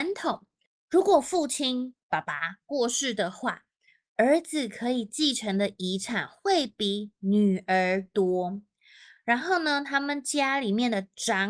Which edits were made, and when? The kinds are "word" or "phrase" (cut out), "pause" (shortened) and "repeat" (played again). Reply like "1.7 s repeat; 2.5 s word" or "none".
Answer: none